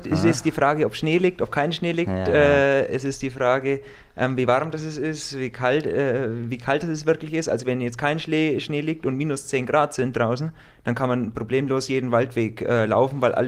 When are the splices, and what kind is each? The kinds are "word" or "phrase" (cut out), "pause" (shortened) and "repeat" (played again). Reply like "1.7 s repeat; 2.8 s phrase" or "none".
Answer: none